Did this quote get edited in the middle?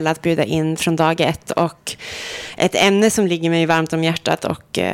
no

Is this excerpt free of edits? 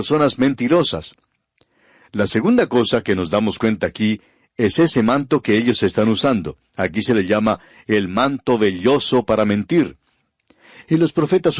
yes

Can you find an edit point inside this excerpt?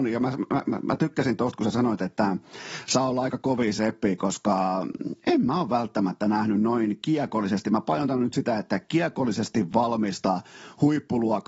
no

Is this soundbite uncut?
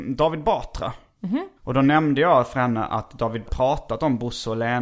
no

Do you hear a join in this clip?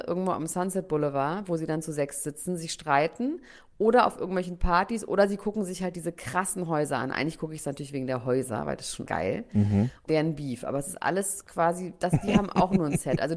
yes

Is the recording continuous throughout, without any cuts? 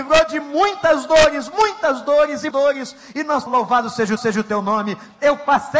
no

